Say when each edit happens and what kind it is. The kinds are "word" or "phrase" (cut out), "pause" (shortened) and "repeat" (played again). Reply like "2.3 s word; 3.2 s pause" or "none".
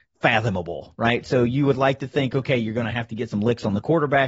none